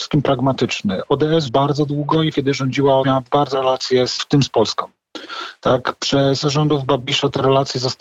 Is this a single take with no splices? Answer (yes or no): no